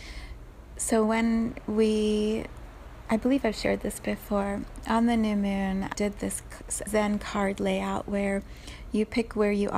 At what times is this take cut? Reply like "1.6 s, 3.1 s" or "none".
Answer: 5.9 s, 6.9 s